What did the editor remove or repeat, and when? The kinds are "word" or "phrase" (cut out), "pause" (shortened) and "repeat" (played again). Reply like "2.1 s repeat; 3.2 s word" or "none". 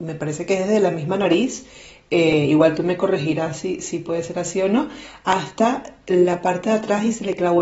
none